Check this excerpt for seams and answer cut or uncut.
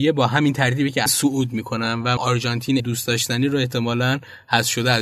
cut